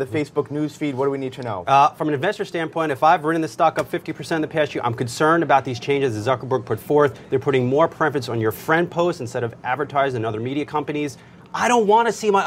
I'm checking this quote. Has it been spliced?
no; 0 cuts

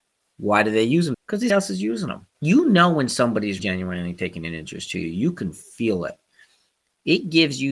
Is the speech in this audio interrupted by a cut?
yes; 4 cuts; at 1.1 s, 1.5 s, 2.3 s, 3.6 s

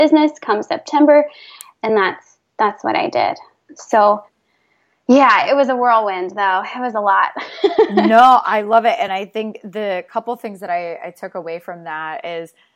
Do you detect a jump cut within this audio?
no; 0 cuts

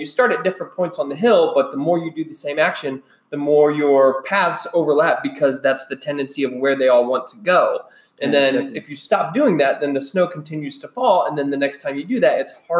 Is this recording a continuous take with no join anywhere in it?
yes; 0 cuts

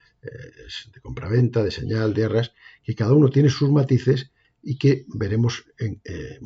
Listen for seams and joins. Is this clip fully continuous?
yes; 0 cuts

